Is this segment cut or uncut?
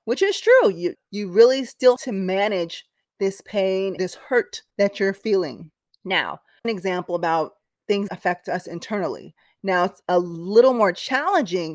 cut